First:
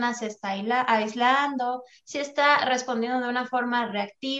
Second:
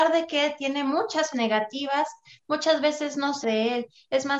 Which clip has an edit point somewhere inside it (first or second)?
second